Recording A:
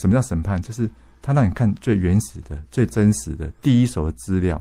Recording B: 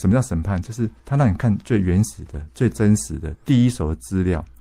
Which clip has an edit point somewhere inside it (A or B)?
B